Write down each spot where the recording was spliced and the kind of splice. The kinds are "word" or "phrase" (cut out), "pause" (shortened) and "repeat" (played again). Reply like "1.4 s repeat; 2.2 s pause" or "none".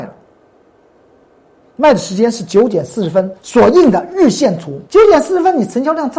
3.4 s pause; 4.9 s pause